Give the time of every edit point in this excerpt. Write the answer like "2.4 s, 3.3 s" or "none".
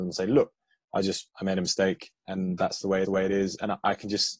1.3 s, 3.0 s